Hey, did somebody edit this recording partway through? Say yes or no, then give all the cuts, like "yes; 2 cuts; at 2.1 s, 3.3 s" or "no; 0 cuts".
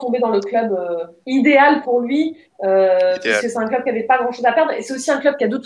no; 0 cuts